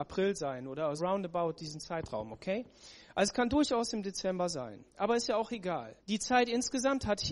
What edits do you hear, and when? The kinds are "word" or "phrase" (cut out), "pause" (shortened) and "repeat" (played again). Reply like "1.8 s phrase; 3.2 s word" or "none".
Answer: 1.0 s word; 4.9 s pause; 6.0 s pause